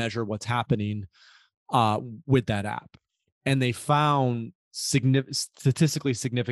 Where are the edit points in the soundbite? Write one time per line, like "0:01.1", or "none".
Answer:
none